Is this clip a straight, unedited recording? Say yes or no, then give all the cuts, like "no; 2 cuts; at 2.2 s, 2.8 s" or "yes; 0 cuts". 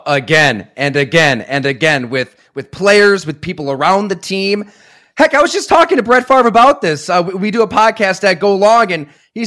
yes; 0 cuts